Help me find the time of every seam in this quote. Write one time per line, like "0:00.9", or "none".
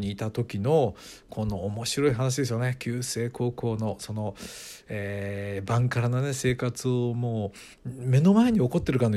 0:07.7